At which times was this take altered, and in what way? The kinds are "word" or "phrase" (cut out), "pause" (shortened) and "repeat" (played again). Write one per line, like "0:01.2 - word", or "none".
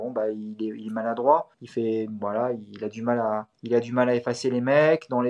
0:01.5 - pause
0:03.5 - pause